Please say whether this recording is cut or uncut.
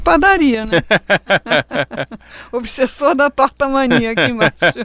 uncut